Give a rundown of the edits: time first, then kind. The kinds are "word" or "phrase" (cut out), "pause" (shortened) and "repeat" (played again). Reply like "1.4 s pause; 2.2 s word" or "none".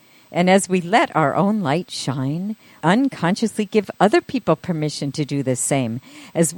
2.8 s word